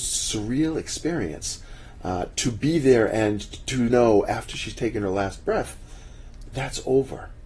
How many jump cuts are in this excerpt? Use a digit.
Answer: 1